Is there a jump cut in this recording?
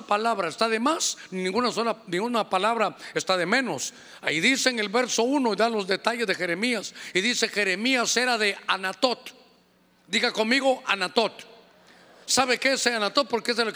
no; 0 cuts

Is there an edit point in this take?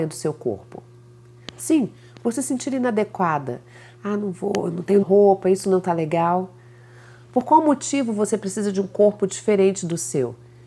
yes; 1 cut; at 5.0 s

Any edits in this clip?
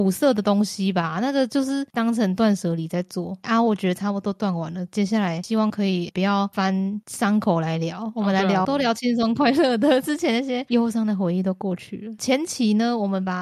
yes; 2 cuts; at 6.1 s, 8.6 s

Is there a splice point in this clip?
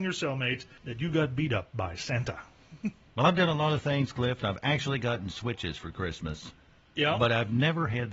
no; 0 cuts

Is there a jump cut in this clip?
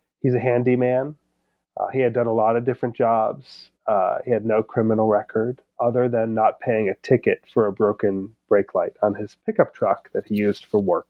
no; 0 cuts

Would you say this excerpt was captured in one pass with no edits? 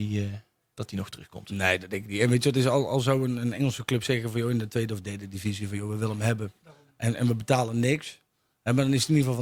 yes; 0 cuts

